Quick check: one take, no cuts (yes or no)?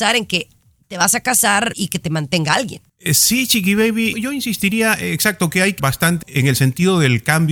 no